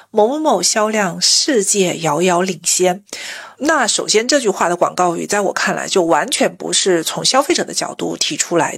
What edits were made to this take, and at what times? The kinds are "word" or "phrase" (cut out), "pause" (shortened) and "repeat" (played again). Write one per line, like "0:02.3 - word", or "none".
0:03.5 - pause